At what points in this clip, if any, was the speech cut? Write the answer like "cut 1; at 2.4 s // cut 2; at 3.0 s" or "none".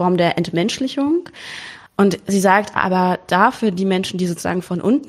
cut 1; at 1.9 s